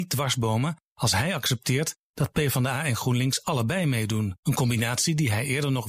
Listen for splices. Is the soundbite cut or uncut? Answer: cut